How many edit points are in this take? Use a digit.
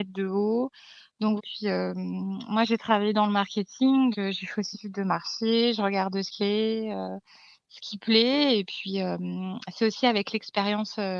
4